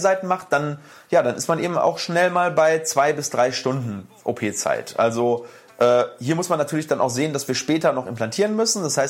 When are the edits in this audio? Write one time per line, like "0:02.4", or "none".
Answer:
none